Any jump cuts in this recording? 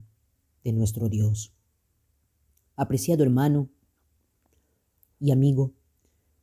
no; 0 cuts

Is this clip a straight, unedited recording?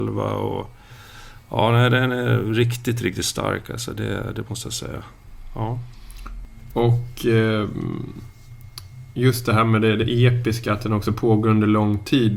yes; 0 cuts

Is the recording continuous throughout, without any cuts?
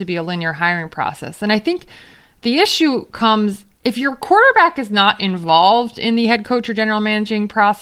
yes; 0 cuts

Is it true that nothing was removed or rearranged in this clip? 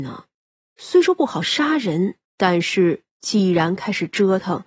no; 1 cut; at 2.2 s

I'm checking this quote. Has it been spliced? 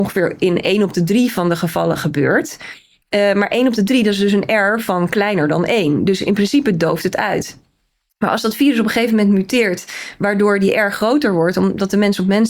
no; 0 cuts

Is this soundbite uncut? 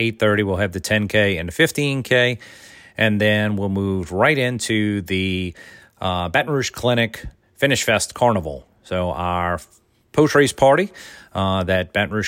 yes; 0 cuts

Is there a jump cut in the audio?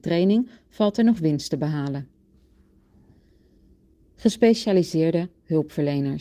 no; 0 cuts

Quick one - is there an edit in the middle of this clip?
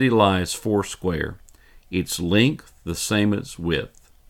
no; 0 cuts

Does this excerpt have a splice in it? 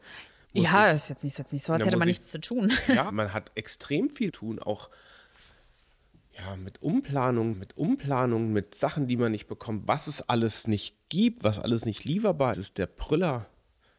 yes; 5 cuts; at 1.4 s, 3.1 s, 4.3 s, 7.5 s, 12.5 s

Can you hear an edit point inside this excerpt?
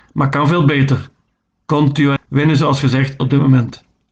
yes; 2 cuts; at 2.2 s, 3.2 s

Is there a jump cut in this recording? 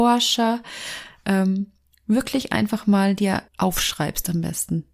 yes; 1 cut; at 3.5 s

